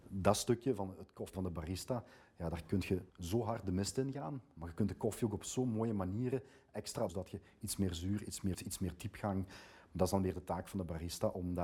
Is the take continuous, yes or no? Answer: no